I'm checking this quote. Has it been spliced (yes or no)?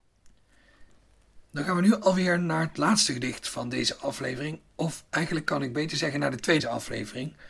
yes